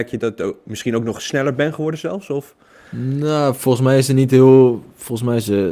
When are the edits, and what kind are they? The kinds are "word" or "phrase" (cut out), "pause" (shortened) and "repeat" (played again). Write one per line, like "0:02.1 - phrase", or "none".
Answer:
none